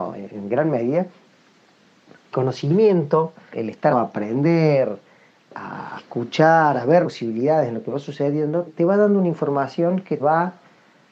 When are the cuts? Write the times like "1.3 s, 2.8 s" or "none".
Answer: 2.3 s, 3.5 s, 3.9 s, 6.0 s, 7.0 s, 8.7 s, 10.2 s